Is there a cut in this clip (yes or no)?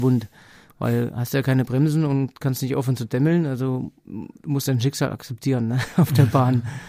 no